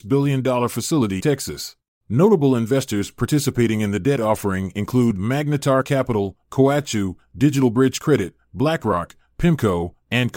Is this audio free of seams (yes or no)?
no